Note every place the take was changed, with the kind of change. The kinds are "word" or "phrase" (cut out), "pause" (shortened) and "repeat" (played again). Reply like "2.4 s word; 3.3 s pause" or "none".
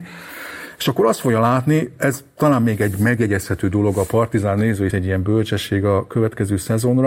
4.9 s phrase